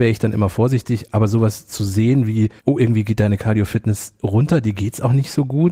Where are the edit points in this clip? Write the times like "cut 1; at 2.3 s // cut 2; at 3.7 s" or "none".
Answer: cut 1; at 2.6 s